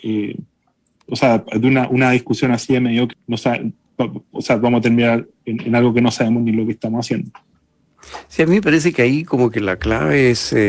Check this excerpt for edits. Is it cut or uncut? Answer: cut